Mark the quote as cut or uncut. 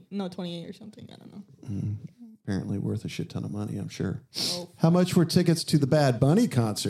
uncut